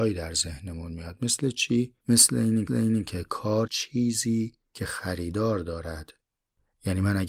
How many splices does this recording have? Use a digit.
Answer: 3